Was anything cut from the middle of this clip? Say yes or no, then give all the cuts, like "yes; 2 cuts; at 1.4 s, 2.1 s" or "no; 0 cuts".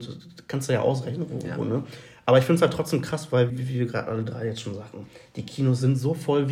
yes; 1 cut; at 3.5 s